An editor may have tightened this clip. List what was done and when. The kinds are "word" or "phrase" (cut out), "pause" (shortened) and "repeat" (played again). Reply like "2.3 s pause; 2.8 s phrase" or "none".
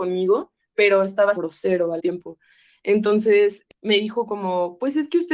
1.4 s word; 2.0 s word